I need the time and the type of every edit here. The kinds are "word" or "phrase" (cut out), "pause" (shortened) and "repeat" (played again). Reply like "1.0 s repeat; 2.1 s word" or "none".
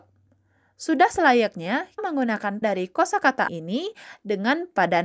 2.0 s word; 2.6 s word; 3.5 s word